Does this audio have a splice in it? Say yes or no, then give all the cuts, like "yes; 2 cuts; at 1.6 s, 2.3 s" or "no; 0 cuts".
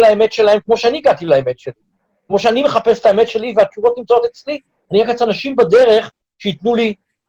no; 0 cuts